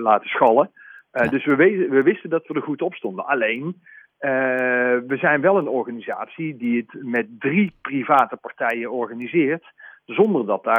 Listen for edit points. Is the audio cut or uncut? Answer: uncut